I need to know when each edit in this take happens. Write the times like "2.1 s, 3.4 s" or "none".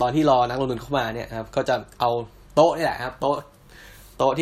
none